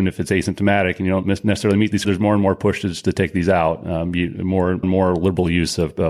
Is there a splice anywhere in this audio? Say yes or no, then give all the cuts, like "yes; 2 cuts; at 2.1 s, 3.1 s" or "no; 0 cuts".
yes; 2 cuts; at 2.0 s, 4.8 s